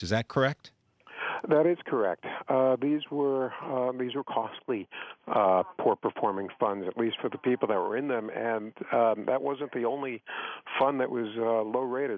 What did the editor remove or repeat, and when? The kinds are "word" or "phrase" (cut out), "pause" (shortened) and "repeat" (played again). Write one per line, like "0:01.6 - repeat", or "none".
none